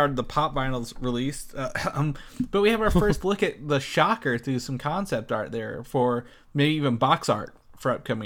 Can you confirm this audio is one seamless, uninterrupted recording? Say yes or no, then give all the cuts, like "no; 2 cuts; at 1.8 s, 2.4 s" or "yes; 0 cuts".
yes; 0 cuts